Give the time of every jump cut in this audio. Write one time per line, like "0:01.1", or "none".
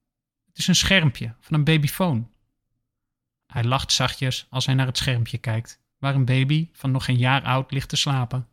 none